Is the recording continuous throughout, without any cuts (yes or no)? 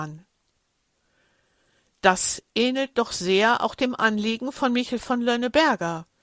yes